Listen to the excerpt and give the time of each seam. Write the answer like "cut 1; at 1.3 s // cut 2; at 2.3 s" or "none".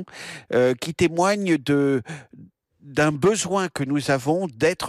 none